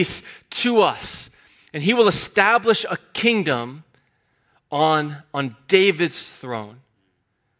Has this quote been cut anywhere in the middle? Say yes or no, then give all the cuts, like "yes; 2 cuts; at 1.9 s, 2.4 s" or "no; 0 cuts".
no; 0 cuts